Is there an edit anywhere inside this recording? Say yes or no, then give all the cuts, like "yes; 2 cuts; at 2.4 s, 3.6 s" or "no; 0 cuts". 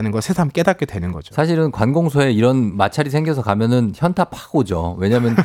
no; 0 cuts